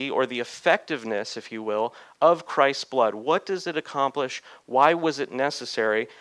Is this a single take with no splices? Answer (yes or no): yes